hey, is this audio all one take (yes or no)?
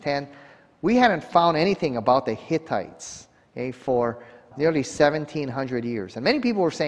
yes